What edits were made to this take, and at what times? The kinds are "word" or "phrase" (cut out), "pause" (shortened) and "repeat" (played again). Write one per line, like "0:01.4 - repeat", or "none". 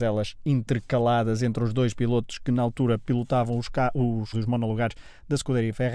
0:04.3 - word